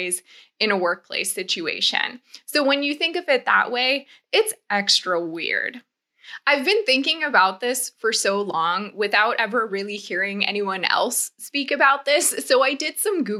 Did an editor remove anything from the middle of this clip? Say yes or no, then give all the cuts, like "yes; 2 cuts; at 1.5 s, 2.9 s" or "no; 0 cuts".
no; 0 cuts